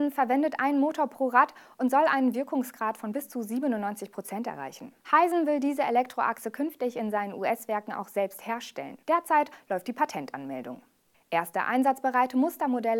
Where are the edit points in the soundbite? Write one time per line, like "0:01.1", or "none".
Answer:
0:05.0
0:09.0
0:11.1